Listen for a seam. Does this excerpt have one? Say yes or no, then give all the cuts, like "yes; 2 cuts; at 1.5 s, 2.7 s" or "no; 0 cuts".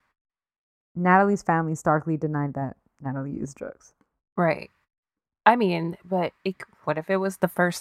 no; 0 cuts